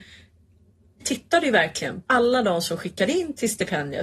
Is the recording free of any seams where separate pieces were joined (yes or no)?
no